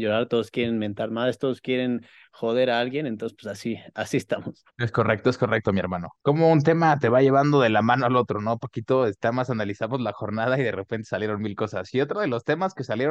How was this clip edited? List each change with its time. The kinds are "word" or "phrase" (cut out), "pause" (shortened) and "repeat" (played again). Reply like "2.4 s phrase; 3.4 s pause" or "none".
4.7 s pause; 6.2 s pause